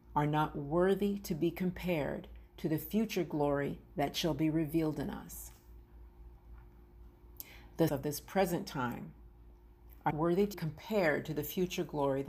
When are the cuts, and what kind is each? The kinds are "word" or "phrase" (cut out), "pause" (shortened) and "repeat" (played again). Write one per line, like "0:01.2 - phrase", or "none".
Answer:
0:07.9 - word
0:10.1 - word
0:10.5 - word